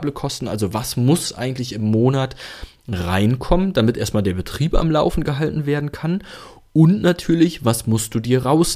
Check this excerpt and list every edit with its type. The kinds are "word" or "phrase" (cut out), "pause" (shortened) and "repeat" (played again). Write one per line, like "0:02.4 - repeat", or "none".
none